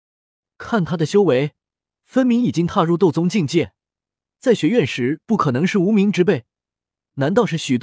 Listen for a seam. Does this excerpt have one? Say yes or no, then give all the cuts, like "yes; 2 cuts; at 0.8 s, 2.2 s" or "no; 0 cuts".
no; 0 cuts